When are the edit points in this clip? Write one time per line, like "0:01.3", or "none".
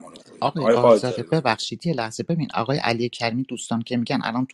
none